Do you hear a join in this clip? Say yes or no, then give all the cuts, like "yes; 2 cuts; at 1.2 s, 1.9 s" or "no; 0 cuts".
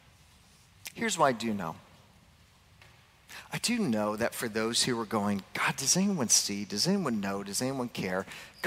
no; 0 cuts